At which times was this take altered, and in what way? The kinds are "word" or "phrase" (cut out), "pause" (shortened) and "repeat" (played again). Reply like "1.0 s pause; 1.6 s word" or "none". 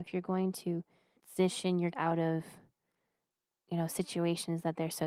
1.2 s word; 1.9 s word